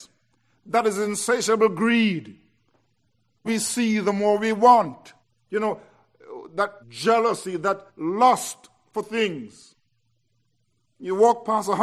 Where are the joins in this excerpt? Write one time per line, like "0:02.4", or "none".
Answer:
0:03.5
0:05.2
0:06.8
0:07.9